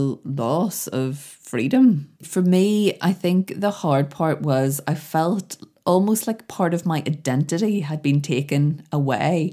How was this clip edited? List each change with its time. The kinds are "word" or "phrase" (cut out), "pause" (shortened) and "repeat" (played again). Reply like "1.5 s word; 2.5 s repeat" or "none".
2.1 s pause